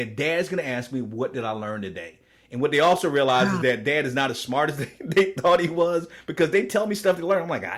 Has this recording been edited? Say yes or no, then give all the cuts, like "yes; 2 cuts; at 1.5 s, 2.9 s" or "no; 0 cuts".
no; 0 cuts